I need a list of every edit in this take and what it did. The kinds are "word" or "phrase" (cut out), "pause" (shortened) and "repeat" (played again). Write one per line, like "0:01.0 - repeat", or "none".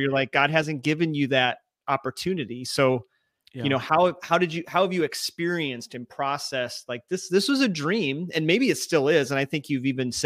none

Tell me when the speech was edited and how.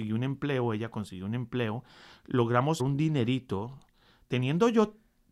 0:02.8 - word

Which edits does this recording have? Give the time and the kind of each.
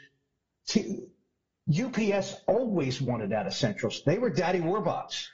none

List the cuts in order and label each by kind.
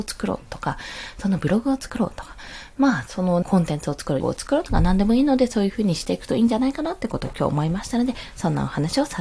0:03.4 - phrase
0:04.2 - word

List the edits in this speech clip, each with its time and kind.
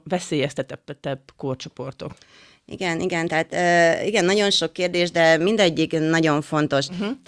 none

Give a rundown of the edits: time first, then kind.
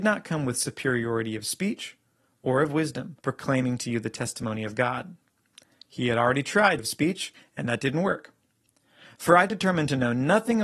0:03.2 - pause
0:06.8 - word

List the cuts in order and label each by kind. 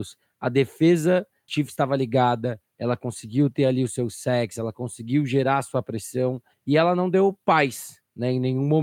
0:01.5 - word

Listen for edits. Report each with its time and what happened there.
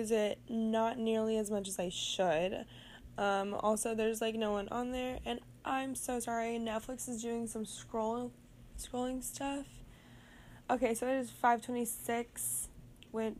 none

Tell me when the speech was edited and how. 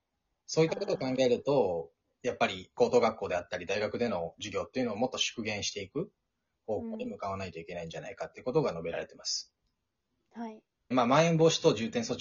0:10.9 - word

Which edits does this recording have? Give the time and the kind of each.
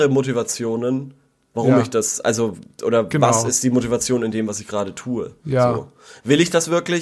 none

